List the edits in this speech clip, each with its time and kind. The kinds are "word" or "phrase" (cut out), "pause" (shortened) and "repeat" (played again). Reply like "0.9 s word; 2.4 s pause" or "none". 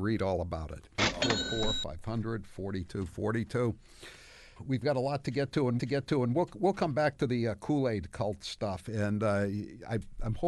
4.6 s word; 5.8 s repeat